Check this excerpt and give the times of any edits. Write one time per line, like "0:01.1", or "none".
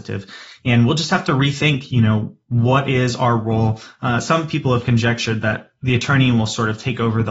0:02.4